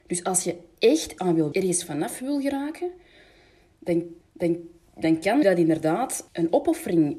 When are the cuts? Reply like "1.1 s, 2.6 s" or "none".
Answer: 1.2 s, 1.5 s, 4.2 s, 5.4 s, 6.3 s